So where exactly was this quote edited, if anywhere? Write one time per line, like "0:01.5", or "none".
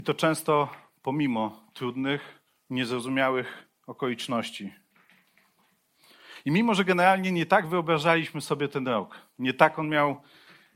0:02.5